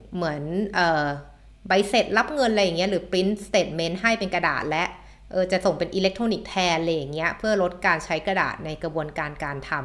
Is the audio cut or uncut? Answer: uncut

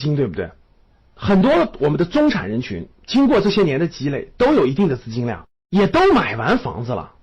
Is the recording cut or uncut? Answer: uncut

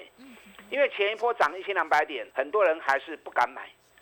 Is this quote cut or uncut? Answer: cut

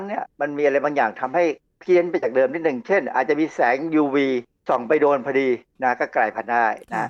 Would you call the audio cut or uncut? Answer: uncut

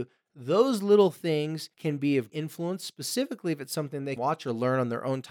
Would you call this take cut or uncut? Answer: cut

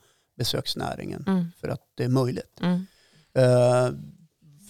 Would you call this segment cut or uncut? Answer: uncut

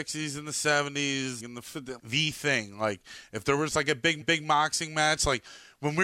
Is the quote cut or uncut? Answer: cut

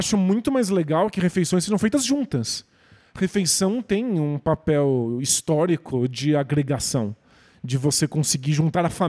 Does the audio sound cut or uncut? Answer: uncut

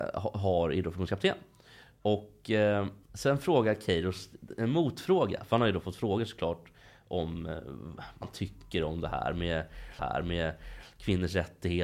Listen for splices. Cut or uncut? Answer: cut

